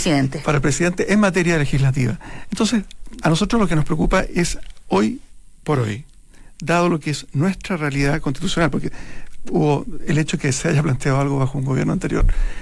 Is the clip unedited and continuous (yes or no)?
no